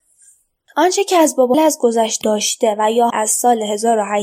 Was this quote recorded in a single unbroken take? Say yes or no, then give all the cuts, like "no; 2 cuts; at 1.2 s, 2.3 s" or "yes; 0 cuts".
no; 3 cuts; at 1.5 s, 2.2 s, 3.1 s